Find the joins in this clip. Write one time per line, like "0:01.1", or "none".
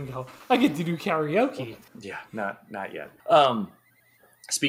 0:01.9
0:03.2